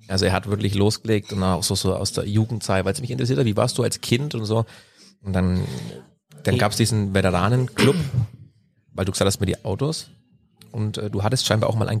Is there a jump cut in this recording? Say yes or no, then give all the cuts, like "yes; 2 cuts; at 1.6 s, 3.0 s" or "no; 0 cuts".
no; 0 cuts